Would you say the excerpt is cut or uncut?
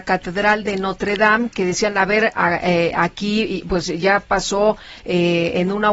uncut